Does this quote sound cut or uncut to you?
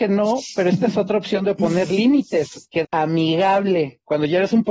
cut